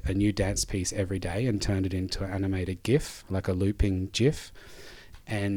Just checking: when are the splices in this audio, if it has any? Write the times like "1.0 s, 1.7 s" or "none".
none